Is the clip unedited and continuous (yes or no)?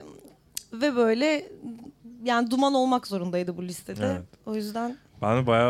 yes